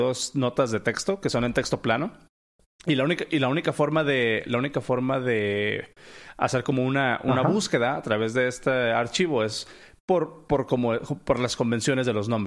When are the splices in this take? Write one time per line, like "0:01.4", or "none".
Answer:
none